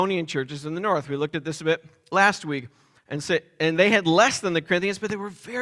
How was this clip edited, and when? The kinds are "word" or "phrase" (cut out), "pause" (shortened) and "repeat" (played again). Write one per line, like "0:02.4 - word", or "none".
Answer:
none